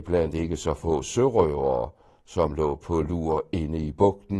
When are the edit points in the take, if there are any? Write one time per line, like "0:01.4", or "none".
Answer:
none